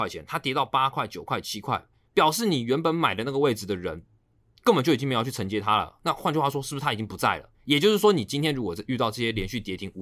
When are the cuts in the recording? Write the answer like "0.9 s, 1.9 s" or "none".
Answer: 7.5 s

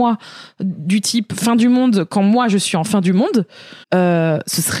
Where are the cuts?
3.8 s

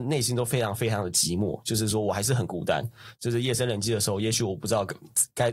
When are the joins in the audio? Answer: none

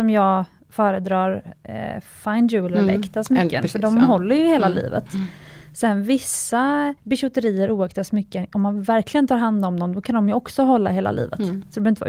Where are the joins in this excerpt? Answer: 7.0 s

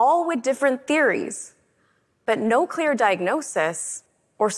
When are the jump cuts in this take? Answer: none

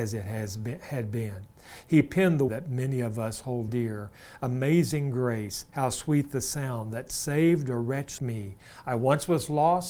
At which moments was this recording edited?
2.5 s, 3.7 s, 5.7 s, 8.2 s

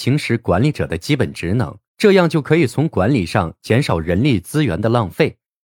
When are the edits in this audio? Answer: 1.9 s

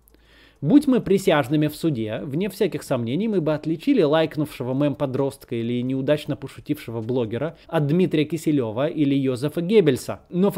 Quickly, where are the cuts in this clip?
7.6 s

